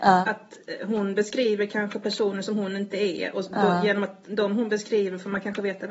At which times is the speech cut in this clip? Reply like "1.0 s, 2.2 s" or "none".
none